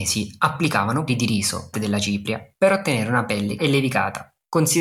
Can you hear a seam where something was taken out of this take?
yes; 3 cuts; at 1.1 s, 1.7 s, 3.6 s

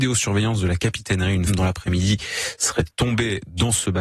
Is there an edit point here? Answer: yes; 1 cut; at 1.5 s

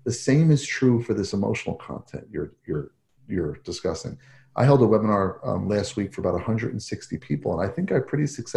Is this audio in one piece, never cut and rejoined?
yes; 0 cuts

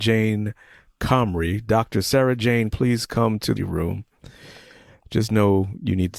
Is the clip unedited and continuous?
no; 2 cuts; at 2.7 s, 3.6 s

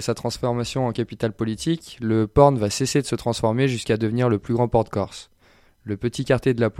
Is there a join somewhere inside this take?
no; 0 cuts

